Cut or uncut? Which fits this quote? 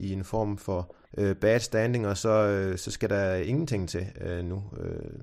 cut